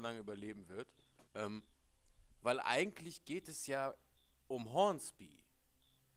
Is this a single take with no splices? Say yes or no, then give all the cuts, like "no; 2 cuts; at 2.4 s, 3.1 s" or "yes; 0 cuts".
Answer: no; 2 cuts; at 1.3 s, 4.3 s